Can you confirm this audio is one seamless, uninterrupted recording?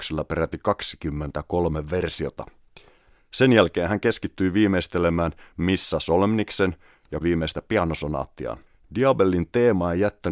no; 2 cuts; at 7.2 s, 8.7 s

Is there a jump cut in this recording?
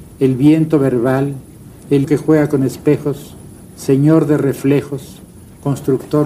yes; 1 cut; at 2.0 s

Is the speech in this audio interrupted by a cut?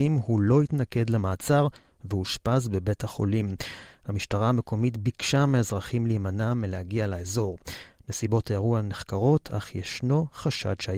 no; 0 cuts

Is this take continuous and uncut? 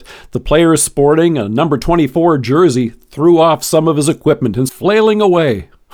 no; 1 cut; at 4.7 s

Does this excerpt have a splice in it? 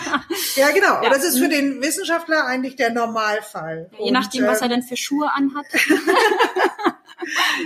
no; 0 cuts

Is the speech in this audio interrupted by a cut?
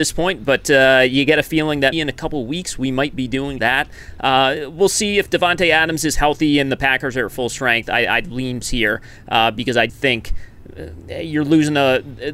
yes; 4 cuts; at 1.9 s, 3.6 s, 8.6 s, 9.9 s

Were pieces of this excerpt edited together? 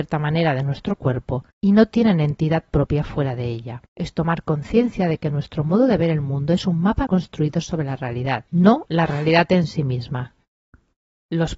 yes; 4 cuts; at 1.5 s, 3.9 s, 7.1 s, 8.5 s

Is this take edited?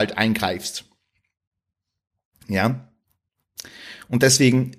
no; 0 cuts

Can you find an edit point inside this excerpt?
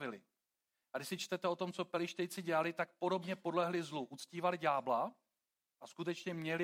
no; 0 cuts

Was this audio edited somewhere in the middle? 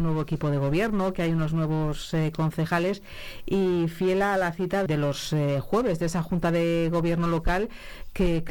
yes; 1 cut; at 4.9 s

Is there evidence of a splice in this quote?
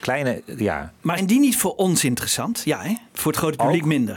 yes; 1 cut; at 1.2 s

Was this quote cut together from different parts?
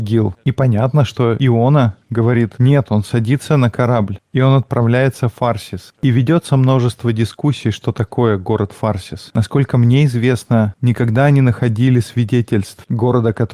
no; 0 cuts

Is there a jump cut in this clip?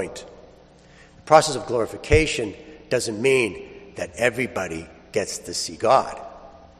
no; 0 cuts

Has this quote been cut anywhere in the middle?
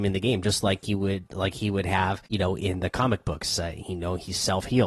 yes; 1 cut; at 2.3 s

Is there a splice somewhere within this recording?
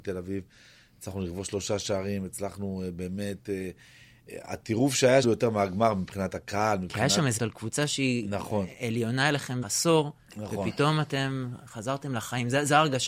yes; 3 cuts; at 5.2 s, 7.4 s, 9.6 s

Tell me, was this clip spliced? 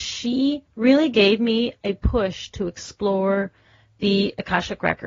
no; 0 cuts

